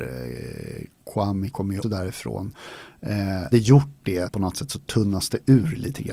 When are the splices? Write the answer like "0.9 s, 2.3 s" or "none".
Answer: 1.5 s, 1.8 s, 3.5 s, 4.3 s